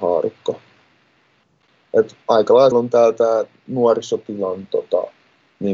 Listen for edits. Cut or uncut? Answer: cut